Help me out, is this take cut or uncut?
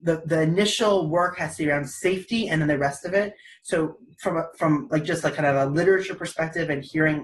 uncut